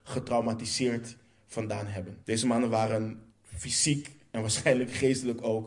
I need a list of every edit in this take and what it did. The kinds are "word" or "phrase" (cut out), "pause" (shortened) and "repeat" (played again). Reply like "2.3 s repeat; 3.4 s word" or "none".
2.2 s pause; 3.3 s pause